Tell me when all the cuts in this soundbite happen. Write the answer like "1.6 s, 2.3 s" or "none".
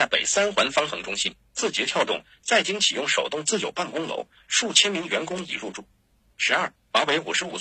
none

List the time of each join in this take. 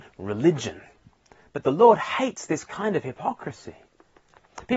none

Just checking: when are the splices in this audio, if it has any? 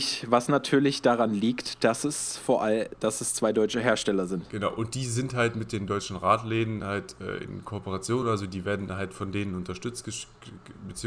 none

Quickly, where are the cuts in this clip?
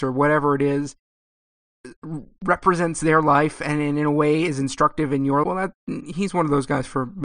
5.4 s

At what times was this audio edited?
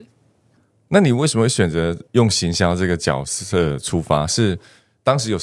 2.1 s

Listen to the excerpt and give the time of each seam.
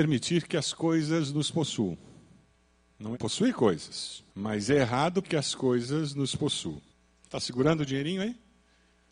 2.7 s, 3.1 s, 4.3 s, 5.2 s, 6.9 s

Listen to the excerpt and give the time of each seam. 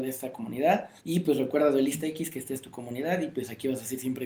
1.0 s

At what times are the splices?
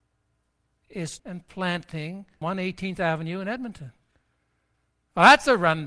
1.2 s, 2.4 s

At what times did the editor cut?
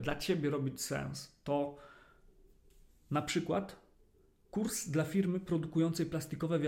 none

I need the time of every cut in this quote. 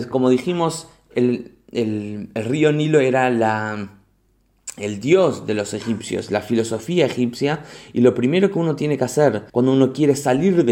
9.5 s

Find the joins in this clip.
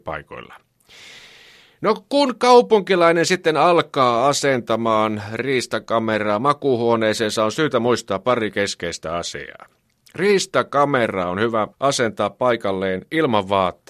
11.7 s

